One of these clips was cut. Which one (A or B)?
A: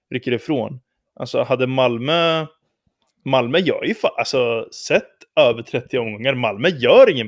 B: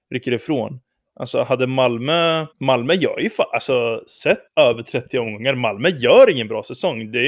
B